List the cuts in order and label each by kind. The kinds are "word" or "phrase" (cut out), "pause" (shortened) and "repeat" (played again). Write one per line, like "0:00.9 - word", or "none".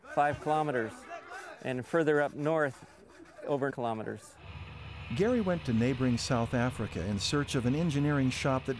0:03.7 - word